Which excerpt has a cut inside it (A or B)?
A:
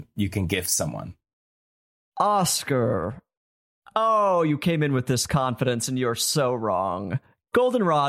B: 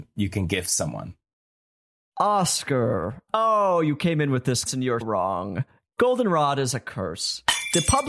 B